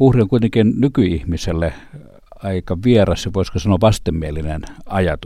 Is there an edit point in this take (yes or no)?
no